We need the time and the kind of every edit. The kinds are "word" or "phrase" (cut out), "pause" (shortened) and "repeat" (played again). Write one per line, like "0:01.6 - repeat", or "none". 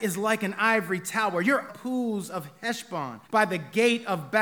0:01.7 - phrase
0:03.2 - pause